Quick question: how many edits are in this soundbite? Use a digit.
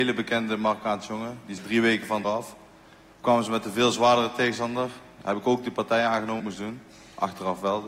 3